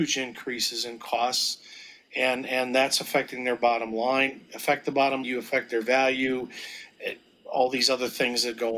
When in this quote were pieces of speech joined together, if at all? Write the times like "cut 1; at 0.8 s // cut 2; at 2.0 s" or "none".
cut 1; at 5.2 s